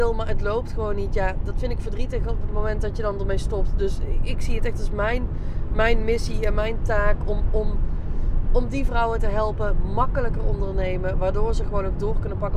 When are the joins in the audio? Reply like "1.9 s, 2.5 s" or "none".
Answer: none